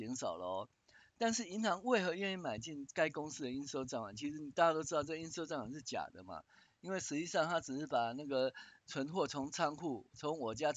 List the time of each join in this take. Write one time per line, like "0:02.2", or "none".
none